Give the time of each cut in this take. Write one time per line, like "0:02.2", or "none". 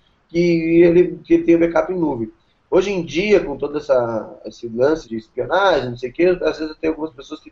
0:05.0